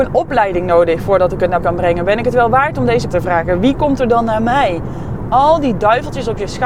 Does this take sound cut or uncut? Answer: cut